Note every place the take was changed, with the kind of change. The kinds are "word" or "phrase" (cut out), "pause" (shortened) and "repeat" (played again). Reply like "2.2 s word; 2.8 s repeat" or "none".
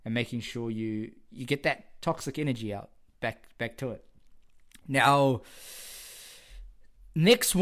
none